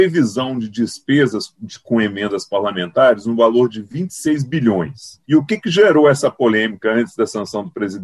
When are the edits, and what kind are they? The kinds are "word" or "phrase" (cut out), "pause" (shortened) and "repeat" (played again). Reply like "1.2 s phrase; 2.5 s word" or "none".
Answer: 5.2 s pause

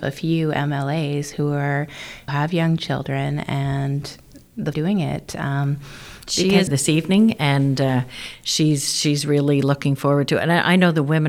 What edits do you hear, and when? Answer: 2.3 s phrase; 4.7 s phrase; 6.7 s phrase

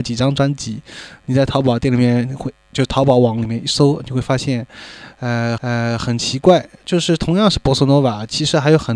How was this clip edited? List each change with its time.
5.6 s repeat

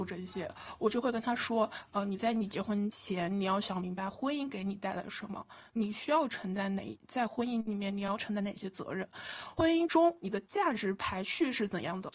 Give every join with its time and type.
none

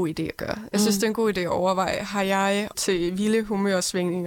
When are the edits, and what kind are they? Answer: 2.7 s word

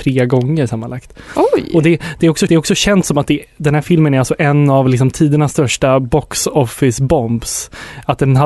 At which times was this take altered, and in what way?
2.5 s repeat

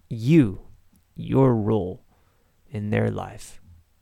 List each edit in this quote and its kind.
none

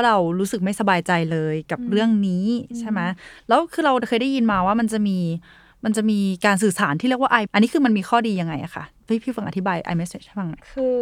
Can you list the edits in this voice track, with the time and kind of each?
7.5 s word

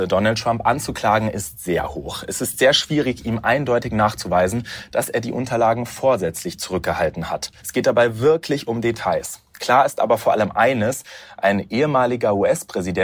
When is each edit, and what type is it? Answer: 7.6 s pause

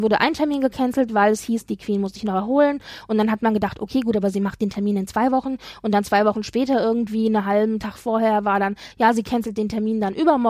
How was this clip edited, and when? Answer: none

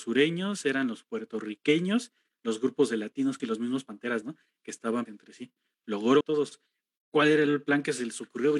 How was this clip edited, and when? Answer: 3.4 s phrase; 4.2 s word; 5.1 s word; 6.2 s phrase

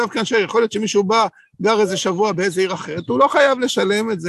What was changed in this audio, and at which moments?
none

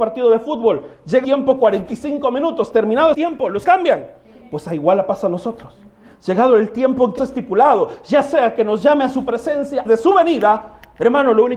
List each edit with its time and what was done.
1.2 s word; 3.1 s word; 3.6 s word; 7.2 s word; 9.9 s word

